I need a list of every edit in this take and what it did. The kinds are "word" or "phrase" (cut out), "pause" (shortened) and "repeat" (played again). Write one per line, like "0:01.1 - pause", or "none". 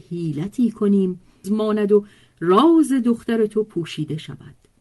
0:01.4 - phrase